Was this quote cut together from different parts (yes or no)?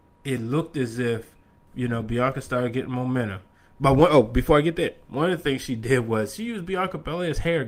no